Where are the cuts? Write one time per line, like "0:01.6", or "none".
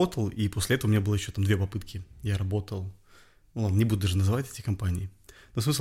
none